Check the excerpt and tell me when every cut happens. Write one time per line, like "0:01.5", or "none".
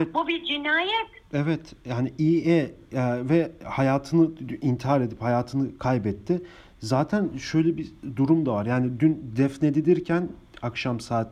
none